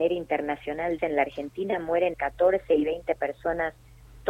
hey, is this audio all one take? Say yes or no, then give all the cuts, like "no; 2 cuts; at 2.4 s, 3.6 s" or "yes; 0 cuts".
no; 2 cuts; at 1.0 s, 2.1 s